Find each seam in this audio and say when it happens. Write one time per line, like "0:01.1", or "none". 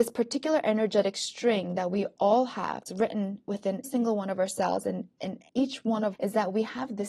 0:02.9
0:03.8
0:05.5
0:06.1